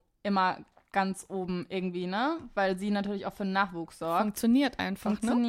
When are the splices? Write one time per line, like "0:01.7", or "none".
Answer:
none